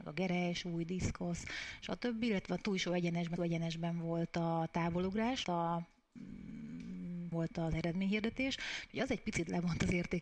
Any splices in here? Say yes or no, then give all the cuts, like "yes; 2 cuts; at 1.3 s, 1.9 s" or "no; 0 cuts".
yes; 3 cuts; at 3.4 s, 5.4 s, 7.3 s